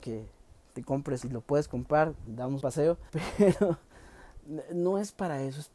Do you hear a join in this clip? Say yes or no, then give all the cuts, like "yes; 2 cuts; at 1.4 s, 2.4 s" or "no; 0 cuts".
yes; 4 cuts; at 1.2 s, 2.3 s, 2.6 s, 3.1 s